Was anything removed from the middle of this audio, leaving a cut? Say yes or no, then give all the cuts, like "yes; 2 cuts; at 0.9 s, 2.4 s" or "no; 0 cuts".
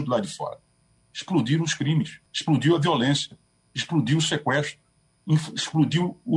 yes; 1 cut; at 2.3 s